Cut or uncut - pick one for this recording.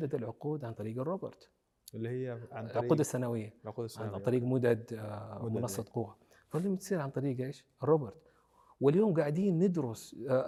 uncut